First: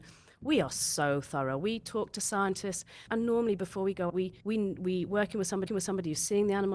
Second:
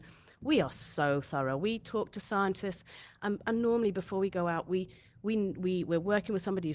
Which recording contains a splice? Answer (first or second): first